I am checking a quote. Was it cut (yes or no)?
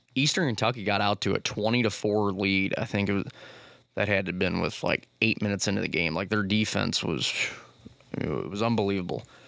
no